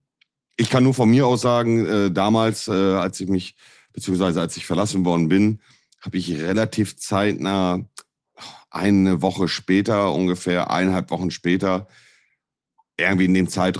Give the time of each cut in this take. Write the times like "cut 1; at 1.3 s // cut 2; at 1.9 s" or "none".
none